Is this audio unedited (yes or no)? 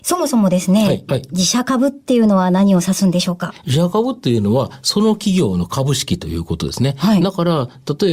no